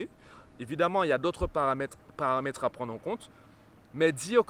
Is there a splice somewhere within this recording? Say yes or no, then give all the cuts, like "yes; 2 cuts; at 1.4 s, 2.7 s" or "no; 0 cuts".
no; 0 cuts